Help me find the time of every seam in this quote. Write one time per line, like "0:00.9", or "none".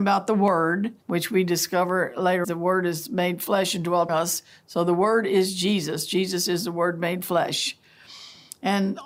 0:01.0
0:02.4
0:04.1